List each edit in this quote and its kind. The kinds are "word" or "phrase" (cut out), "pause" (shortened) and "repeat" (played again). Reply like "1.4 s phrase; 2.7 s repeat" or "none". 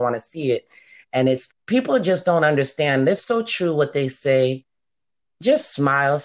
1.5 s word

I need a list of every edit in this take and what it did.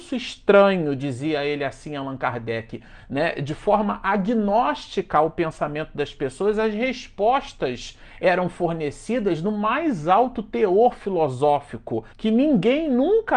12.1 s pause

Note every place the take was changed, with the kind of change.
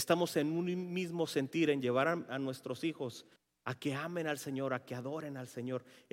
3.4 s pause

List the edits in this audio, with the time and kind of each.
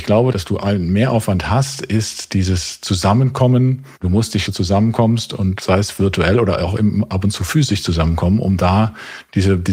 3.9 s pause; 4.4 s phrase

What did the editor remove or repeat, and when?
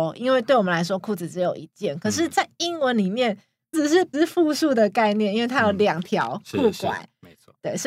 3.7 s word; 4.1 s word

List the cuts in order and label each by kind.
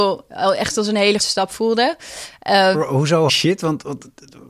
1.2 s word; 2.7 s word; 3.3 s word

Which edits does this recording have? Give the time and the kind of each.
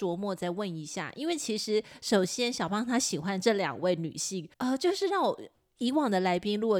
4.5 s pause

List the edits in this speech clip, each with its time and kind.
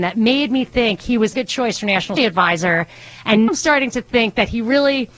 1.3 s phrase; 2.2 s word; 3.5 s word

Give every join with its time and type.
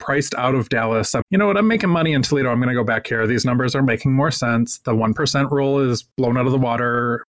1.2 s word; 6.1 s pause

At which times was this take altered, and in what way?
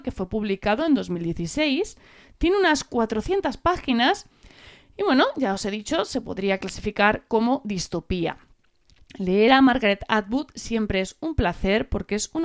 none

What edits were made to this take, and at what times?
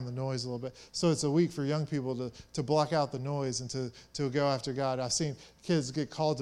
none

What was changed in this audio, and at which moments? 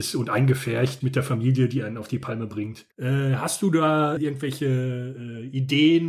1.0 s word; 2.9 s pause; 4.2 s word

